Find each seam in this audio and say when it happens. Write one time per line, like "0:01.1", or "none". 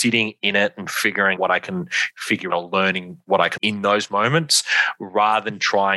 0:01.4
0:02.5
0:03.6